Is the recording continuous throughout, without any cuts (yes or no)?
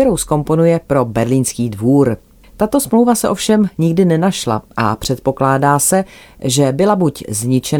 yes